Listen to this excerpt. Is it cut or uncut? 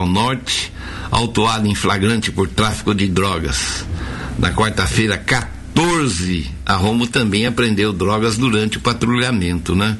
uncut